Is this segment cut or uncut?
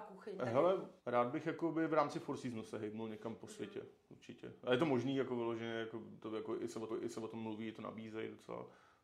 cut